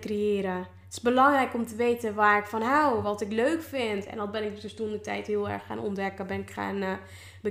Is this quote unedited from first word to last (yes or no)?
yes